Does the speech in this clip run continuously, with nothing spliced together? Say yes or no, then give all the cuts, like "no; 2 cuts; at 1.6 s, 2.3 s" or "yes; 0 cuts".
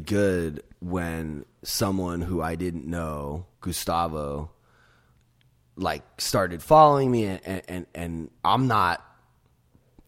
no; 3 cuts; at 3.5 s, 7.9 s, 8.4 s